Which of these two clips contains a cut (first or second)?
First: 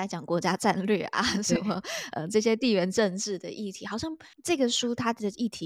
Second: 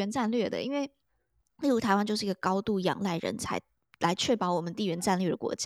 first